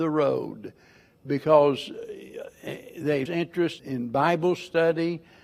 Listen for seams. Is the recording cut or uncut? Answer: cut